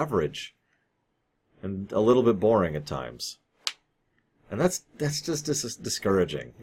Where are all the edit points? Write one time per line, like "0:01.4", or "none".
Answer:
none